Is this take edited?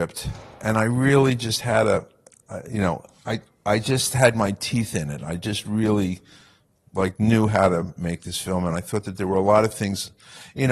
no; 0 cuts

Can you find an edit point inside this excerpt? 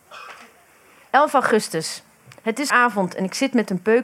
yes; 1 cut; at 2.7 s

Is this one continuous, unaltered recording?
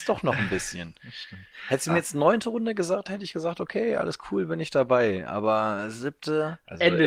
yes; 0 cuts

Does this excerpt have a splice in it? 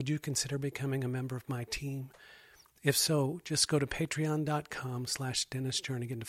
no; 0 cuts

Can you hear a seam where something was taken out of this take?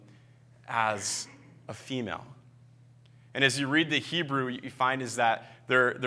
no; 0 cuts

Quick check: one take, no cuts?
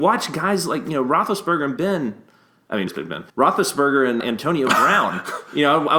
no; 4 cuts; at 1.8 s, 2.9 s, 3.3 s, 4.2 s

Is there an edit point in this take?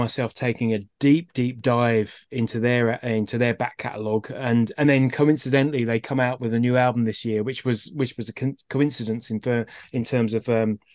no; 0 cuts

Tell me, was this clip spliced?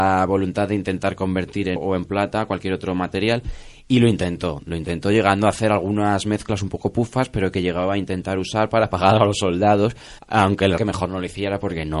yes; 3 cuts; at 1.8 s, 10.2 s, 10.8 s

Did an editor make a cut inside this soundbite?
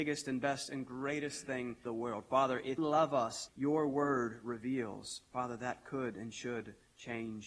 yes; 3 cuts; at 1.9 s, 2.8 s, 3.5 s

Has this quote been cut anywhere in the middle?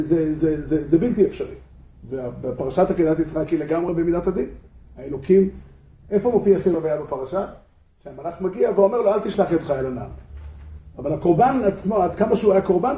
no; 0 cuts

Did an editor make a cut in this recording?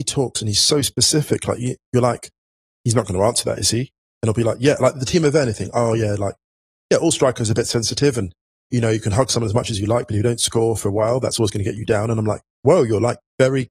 no; 0 cuts

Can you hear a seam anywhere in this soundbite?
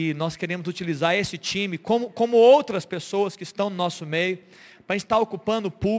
no; 0 cuts

